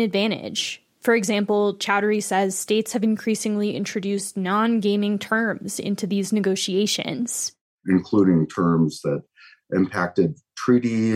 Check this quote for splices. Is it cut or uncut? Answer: uncut